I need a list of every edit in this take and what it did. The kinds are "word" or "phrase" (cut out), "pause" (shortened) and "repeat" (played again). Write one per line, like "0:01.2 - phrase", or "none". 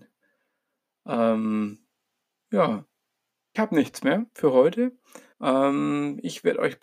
0:03.5 - phrase
0:05.3 - pause

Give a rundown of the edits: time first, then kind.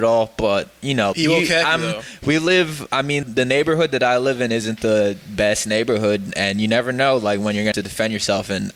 0:01.1 - word
0:03.2 - word
0:07.7 - word

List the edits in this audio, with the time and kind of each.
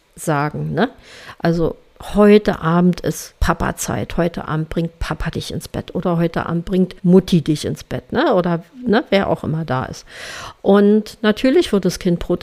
0:03.4 - pause
0:07.0 - pause

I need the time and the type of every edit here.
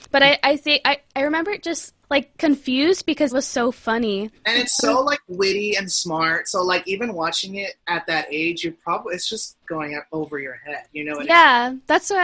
0:02.0 - pause
0:03.3 - word
0:04.4 - pause
0:07.8 - pause

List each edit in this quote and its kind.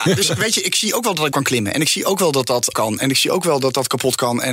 0:01.3 - word
0:02.7 - word

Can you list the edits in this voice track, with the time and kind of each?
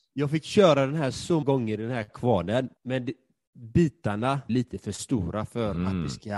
0:01.4 - word
0:02.8 - pause
0:04.5 - word

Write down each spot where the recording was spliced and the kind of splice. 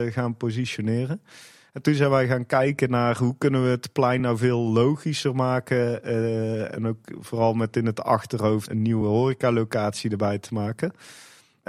none

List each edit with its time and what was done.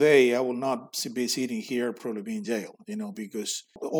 none

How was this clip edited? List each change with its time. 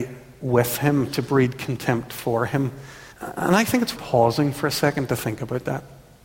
0:03.1 - pause
0:04.0 - word

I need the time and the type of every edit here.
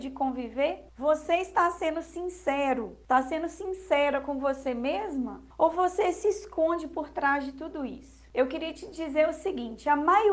none

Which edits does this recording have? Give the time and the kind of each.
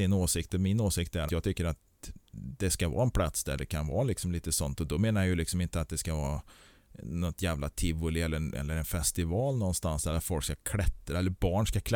0:01.3 - word

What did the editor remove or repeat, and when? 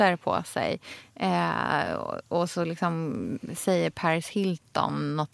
none

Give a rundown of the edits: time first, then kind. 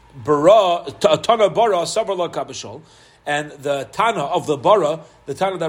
none

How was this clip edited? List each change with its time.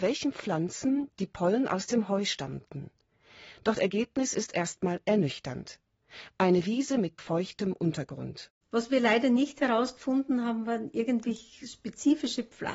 0:03.8 - word
0:07.2 - word

